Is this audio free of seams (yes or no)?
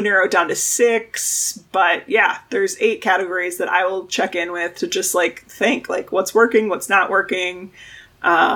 yes